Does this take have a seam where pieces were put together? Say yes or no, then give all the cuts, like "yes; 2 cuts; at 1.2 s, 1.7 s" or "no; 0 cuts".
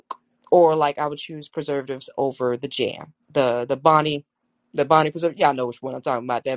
yes; 1 cut; at 3.2 s